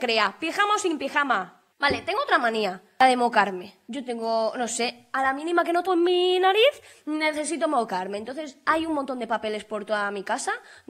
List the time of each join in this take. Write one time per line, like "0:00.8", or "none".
0:05.9

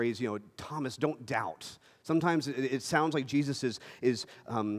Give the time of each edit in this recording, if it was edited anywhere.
none

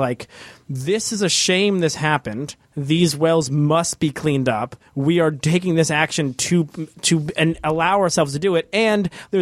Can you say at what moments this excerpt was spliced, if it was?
0:02.6

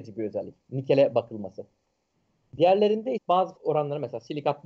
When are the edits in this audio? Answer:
0:03.2
0:03.6

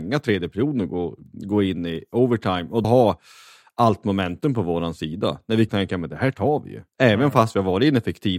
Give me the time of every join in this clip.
0:02.8
0:05.7
0:06.9

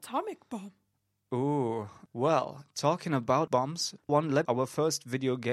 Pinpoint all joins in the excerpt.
0:03.5
0:04.1
0:04.5

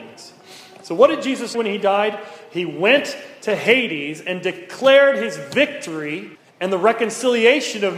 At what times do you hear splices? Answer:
0:01.5
0:06.3

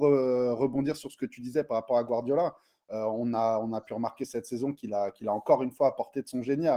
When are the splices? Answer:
none

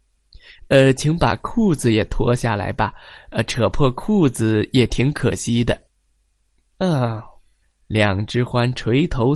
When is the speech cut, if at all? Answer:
0:05.9
0:07.6

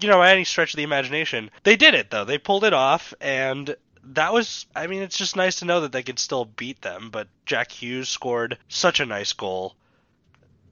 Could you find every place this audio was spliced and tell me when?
0:01.6
0:03.9
0:04.7
0:08.6

